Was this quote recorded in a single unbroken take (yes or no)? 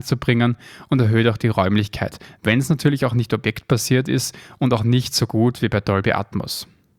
yes